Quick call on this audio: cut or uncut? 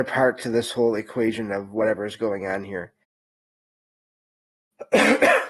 uncut